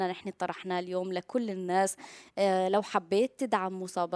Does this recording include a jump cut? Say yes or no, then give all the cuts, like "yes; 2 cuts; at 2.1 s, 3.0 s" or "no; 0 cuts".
no; 0 cuts